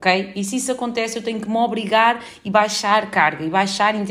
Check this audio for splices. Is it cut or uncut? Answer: uncut